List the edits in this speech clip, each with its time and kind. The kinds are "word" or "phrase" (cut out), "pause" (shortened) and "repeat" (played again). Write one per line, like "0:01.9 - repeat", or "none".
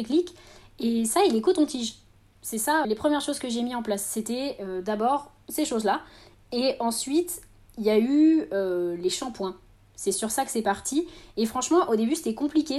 0:02.8 - word